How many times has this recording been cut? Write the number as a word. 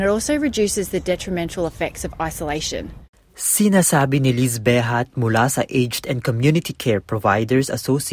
zero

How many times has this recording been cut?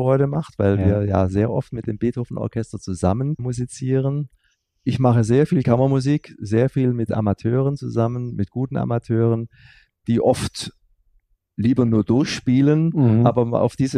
one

